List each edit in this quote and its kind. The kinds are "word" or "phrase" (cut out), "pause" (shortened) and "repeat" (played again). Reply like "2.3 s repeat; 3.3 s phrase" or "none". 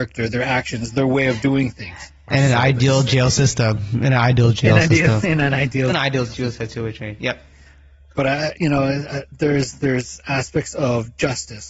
none